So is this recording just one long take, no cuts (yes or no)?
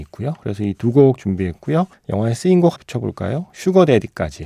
no